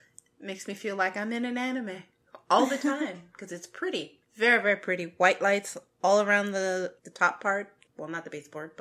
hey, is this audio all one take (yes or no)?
no